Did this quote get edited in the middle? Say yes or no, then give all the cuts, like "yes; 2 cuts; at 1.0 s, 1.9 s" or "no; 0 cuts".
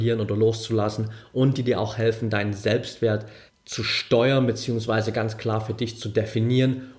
yes; 1 cut; at 3.5 s